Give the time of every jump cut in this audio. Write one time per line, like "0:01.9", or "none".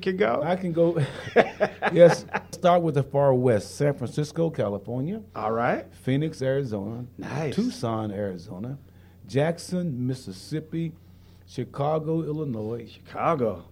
0:02.5